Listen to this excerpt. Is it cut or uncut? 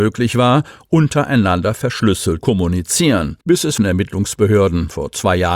cut